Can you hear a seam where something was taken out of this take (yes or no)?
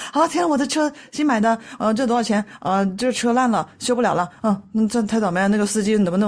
no